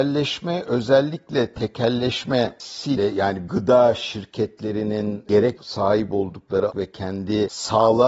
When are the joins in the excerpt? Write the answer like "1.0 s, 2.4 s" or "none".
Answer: 3.0 s, 3.5 s, 5.6 s, 6.7 s